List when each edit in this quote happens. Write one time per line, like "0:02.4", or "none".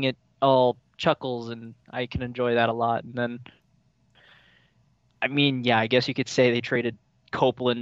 none